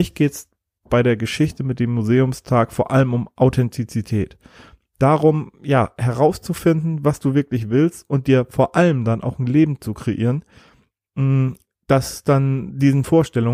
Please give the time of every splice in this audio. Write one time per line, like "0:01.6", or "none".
none